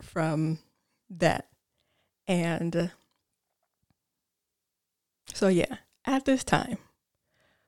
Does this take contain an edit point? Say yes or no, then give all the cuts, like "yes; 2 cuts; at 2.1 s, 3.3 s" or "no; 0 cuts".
no; 0 cuts